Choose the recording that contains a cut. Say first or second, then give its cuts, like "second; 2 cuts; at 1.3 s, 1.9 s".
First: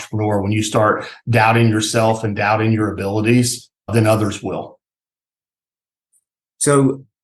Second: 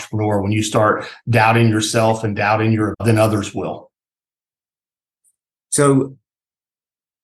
second; 1 cut; at 2.9 s